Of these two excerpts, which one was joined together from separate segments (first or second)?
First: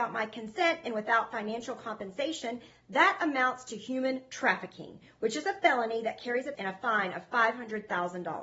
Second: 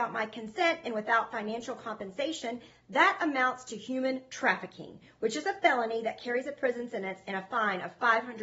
first